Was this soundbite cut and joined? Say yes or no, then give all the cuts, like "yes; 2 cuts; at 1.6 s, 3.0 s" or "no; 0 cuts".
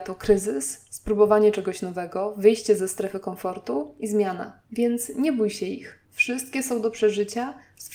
yes; 2 cuts; at 4.6 s, 6.1 s